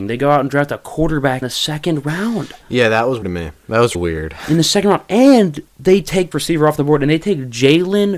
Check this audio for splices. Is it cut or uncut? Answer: cut